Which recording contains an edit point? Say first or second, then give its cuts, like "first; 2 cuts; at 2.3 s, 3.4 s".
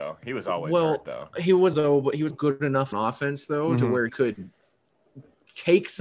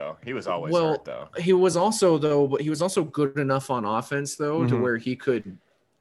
first; 4 cuts; at 1.7 s, 2.3 s, 2.9 s, 4.1 s